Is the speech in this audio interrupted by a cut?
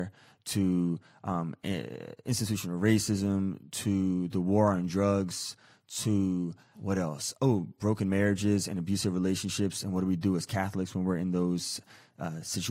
yes; 1 cut; at 6.7 s

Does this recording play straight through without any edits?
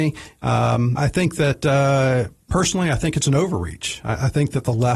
no; 1 cut; at 1.0 s

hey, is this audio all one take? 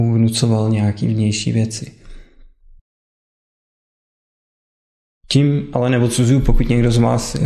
yes; 0 cuts

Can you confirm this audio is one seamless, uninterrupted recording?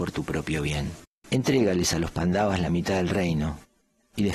yes; 0 cuts

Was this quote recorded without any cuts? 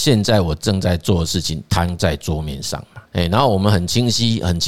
no; 1 cut; at 3.1 s

